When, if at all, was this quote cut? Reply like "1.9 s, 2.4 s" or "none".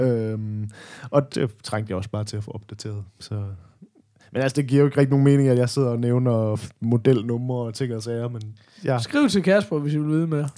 1.3 s